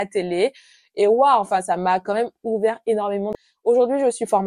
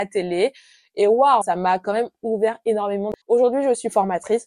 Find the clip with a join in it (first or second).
second